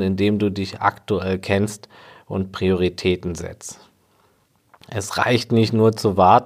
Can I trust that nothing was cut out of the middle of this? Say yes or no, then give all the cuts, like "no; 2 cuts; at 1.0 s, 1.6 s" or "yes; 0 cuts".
yes; 0 cuts